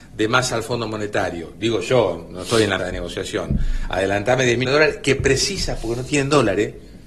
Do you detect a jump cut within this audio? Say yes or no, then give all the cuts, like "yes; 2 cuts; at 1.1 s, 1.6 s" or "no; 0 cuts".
yes; 2 cuts; at 2.8 s, 4.6 s